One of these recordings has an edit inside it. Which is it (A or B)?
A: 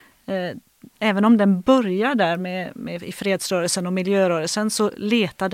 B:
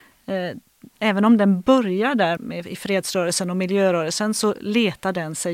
B